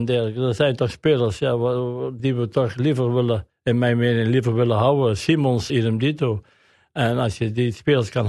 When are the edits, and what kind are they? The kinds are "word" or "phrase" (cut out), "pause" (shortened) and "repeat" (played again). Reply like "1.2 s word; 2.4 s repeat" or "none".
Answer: 2.2 s word; 3.5 s pause; 5.7 s word